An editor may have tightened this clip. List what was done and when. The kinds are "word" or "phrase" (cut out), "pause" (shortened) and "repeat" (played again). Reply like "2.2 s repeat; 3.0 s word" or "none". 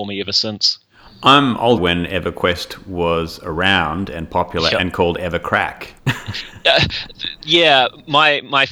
1.8 s phrase; 6.0 s pause